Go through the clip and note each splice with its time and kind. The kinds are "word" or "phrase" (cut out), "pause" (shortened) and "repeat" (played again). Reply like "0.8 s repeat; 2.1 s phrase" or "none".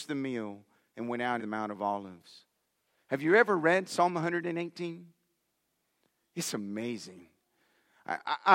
1.4 s word

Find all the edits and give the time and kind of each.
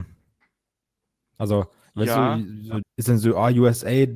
2.8 s word

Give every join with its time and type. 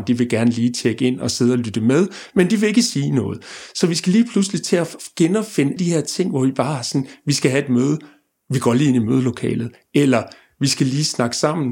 5.8 s word

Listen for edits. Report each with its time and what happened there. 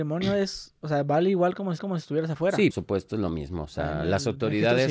1.8 s repeat; 2.7 s word

